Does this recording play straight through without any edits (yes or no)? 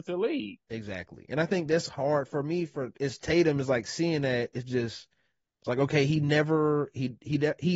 yes